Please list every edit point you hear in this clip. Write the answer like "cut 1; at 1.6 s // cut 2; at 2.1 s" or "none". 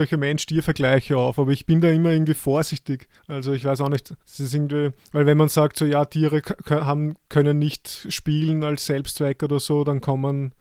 cut 1; at 3.2 s // cut 2; at 4.2 s // cut 3; at 7.2 s